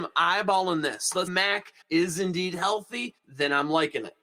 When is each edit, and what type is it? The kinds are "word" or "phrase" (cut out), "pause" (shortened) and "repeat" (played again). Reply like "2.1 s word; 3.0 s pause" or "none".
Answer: 1.3 s word; 1.8 s pause; 3.2 s pause